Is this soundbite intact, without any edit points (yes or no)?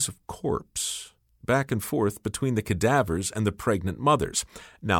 yes